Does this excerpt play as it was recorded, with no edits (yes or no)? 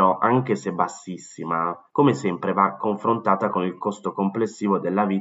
no